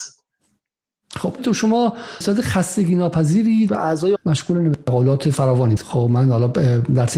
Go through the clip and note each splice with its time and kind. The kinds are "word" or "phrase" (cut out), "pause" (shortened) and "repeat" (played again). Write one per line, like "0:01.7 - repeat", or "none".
0:01.4 - word
0:02.2 - word
0:03.7 - word
0:04.2 - word
0:05.8 - word